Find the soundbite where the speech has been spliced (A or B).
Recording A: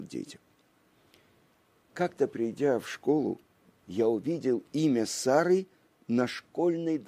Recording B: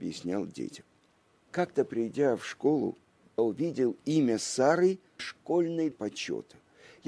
B